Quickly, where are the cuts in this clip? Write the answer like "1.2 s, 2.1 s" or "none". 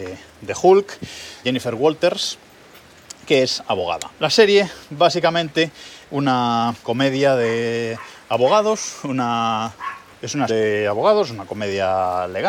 1.4 s, 6.0 s, 6.8 s, 10.5 s

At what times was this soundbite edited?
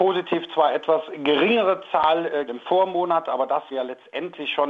2.5 s, 3.7 s

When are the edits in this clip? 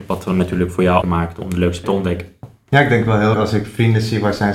1.0 s, 1.8 s, 3.3 s

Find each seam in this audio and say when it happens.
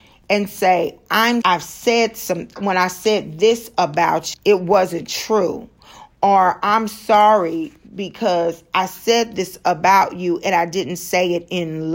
1.4 s, 2.6 s, 4.3 s

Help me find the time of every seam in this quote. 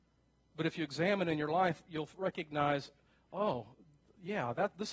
none

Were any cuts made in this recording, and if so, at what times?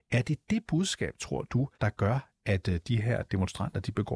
1.7 s

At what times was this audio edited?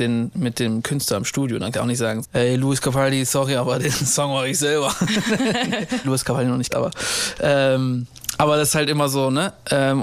1.7 s, 2.2 s, 6.0 s, 6.7 s

